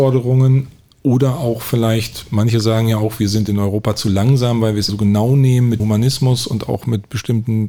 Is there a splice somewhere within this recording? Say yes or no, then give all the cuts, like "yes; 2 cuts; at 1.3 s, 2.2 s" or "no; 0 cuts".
yes; 2 cuts; at 4.9 s, 5.8 s